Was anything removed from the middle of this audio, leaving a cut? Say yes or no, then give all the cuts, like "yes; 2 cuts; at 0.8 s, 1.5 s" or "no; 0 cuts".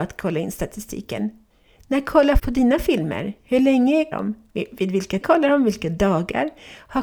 yes; 3 cuts; at 2.4 s, 4.1 s, 5.2 s